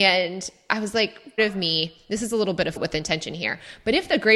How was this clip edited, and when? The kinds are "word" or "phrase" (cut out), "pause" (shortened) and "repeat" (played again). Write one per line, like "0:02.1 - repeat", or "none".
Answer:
0:01.4 - phrase
0:02.8 - word

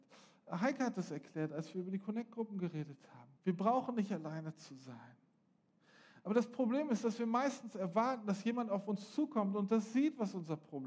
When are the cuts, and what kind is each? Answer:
0:03.4 - pause

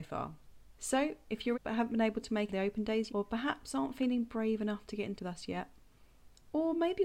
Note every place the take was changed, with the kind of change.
0:01.5 - word
0:02.5 - word
0:03.1 - word
0:05.2 - word

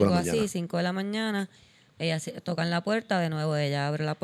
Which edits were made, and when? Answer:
none

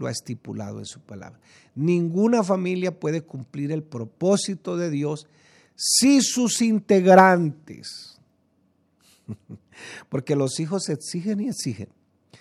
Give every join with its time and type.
none

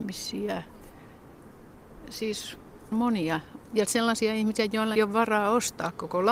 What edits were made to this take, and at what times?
0:02.9 - word
0:03.8 - word
0:04.9 - word

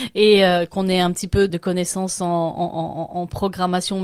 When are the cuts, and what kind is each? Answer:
0:01.5 - word

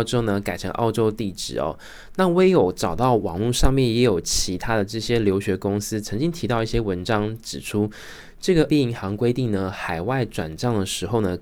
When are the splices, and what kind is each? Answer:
0:08.7 - word

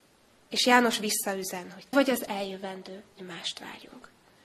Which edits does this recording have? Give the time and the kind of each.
0:01.9 - word
0:03.2 - word

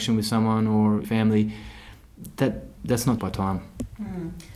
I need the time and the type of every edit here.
0:01.0 - word
0:02.8 - word
0:03.2 - word

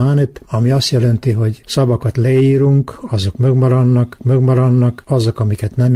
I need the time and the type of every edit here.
0:04.2 - repeat

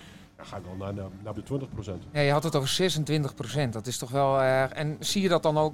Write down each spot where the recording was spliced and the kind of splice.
0:01.4 - word

